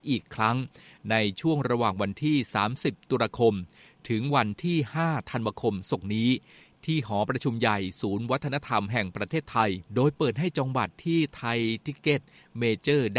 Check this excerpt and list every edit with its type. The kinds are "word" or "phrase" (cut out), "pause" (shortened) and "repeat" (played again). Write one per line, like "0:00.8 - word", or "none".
0:09.8 - pause